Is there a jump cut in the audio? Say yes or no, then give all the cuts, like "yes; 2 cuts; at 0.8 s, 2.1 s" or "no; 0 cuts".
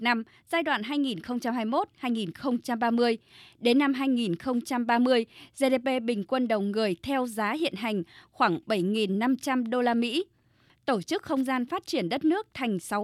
no; 0 cuts